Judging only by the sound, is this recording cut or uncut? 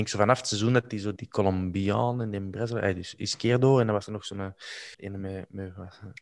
cut